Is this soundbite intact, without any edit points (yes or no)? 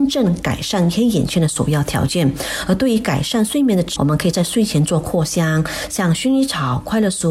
no